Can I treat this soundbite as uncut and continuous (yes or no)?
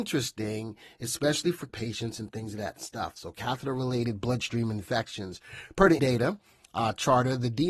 no